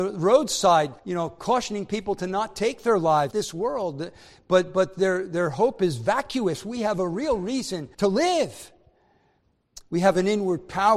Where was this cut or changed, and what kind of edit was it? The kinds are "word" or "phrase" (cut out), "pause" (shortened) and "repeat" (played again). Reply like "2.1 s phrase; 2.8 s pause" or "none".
1.0 s pause; 3.3 s phrase; 7.9 s pause